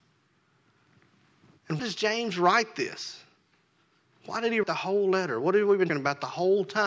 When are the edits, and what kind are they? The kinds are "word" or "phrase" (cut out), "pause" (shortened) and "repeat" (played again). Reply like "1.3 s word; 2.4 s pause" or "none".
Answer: 1.8 s word; 4.6 s word; 5.9 s word